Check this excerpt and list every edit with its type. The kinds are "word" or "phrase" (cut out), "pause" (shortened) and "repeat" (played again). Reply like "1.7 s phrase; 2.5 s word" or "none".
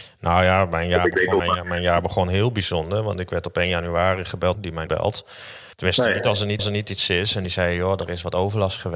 1.4 s phrase; 4.5 s phrase; 4.9 s word; 5.7 s pause; 6.6 s repeat